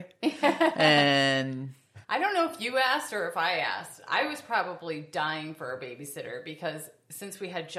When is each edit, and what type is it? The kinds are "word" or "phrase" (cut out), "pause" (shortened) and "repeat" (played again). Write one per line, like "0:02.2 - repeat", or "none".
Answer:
0:02.0 - pause